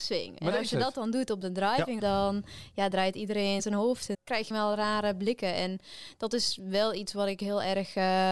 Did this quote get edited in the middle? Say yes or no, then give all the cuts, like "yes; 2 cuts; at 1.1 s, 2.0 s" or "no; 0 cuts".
yes; 4 cuts; at 2.0 s, 3.6 s, 4.1 s, 4.5 s